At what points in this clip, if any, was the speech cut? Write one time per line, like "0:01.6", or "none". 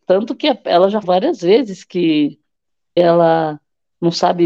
0:01.0
0:03.0